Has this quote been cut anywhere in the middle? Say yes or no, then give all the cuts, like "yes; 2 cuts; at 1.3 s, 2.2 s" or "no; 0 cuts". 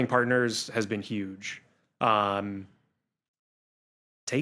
no; 0 cuts